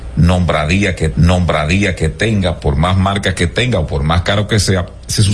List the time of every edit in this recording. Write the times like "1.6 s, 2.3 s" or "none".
1.1 s